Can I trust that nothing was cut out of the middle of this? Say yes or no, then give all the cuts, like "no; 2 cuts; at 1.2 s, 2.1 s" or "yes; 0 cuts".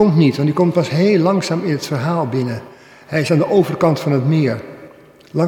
yes; 0 cuts